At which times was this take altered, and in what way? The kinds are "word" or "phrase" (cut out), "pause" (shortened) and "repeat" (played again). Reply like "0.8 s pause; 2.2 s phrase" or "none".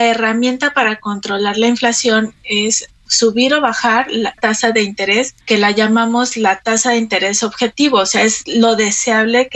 2.4 s word; 4.4 s word; 5.4 s pause